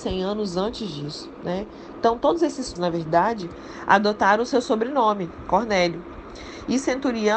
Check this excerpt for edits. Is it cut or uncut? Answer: cut